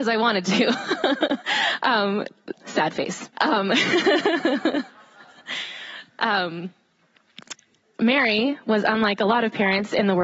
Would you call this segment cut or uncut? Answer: cut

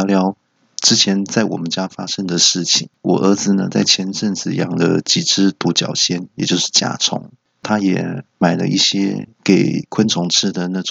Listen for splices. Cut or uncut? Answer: cut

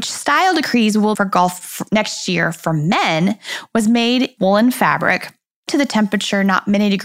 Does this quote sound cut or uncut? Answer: cut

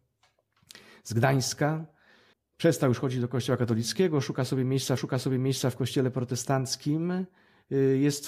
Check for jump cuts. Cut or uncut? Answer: cut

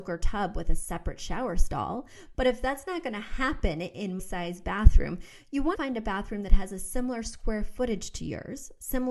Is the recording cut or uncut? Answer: cut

